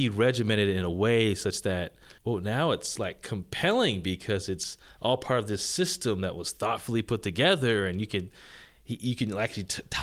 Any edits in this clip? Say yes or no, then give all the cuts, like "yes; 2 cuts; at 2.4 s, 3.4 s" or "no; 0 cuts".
yes; 1 cut; at 2.2 s